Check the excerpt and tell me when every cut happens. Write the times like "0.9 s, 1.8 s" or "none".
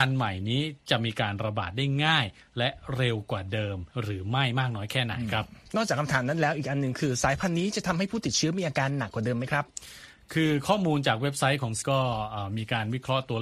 3.9 s, 11.8 s